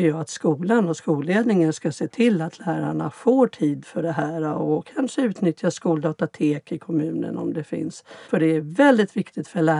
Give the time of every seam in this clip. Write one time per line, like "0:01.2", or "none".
0:08.2